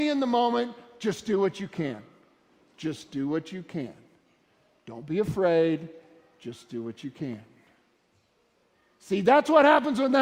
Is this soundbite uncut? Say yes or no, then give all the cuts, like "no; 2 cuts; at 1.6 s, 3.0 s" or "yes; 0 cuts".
yes; 0 cuts